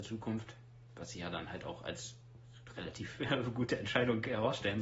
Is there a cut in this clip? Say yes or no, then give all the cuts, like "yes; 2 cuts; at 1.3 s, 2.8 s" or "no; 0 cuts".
no; 0 cuts